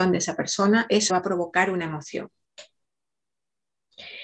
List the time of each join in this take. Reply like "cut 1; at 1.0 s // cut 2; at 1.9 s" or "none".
cut 1; at 1.1 s